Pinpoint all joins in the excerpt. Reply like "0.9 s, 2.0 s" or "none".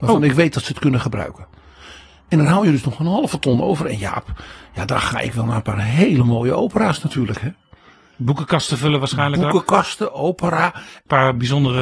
none